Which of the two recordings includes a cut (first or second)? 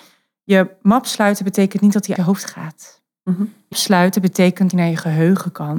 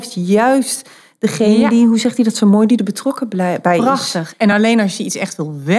first